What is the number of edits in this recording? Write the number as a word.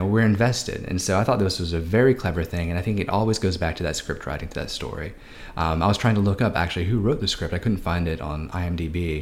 zero